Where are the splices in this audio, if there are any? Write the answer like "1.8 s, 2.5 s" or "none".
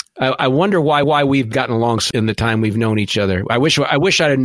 1.0 s, 2.1 s